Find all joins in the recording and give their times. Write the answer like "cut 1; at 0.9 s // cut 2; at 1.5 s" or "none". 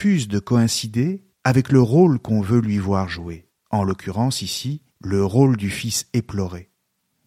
cut 1; at 1.3 s // cut 2; at 3.6 s // cut 3; at 4.9 s